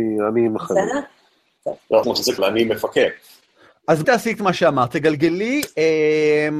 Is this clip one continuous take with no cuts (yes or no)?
no